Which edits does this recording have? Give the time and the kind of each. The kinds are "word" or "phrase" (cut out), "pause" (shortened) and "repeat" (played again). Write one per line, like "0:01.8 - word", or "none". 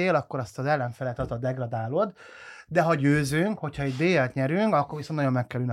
none